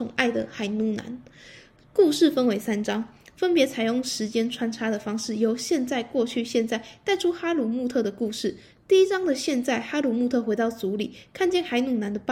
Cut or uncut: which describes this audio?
uncut